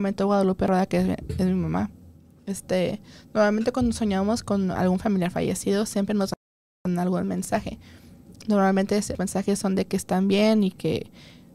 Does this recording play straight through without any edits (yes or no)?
yes